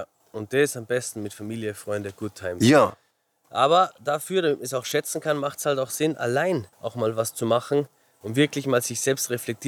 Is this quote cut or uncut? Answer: cut